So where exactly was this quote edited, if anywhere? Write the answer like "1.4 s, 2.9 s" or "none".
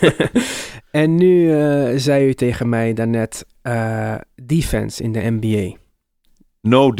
none